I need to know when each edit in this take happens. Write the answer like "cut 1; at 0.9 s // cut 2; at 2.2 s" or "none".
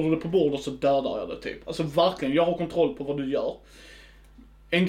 none